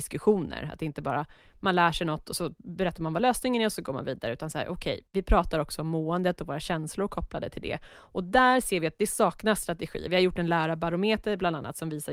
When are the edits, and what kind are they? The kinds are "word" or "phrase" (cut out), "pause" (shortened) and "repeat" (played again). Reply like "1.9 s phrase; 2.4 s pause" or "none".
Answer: none